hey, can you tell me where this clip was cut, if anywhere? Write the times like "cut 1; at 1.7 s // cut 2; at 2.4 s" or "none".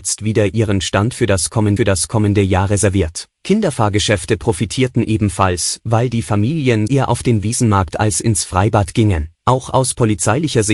cut 1; at 1.8 s // cut 2; at 3.3 s // cut 3; at 6.9 s // cut 4; at 9.3 s